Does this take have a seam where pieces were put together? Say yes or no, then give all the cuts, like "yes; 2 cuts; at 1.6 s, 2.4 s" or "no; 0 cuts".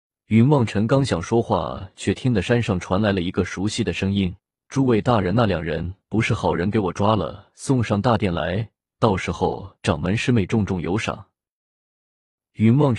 yes; 1 cut; at 4.4 s